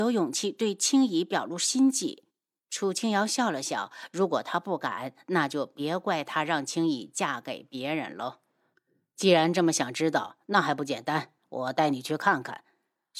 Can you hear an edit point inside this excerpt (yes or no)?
yes